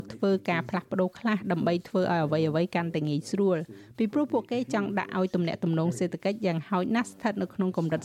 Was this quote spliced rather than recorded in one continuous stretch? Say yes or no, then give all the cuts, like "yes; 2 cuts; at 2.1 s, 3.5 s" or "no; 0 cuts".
no; 0 cuts